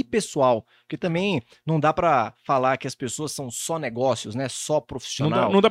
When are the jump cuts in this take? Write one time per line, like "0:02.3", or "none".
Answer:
none